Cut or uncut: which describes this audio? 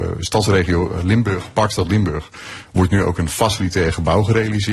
uncut